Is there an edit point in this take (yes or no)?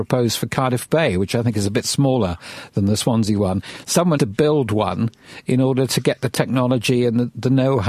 yes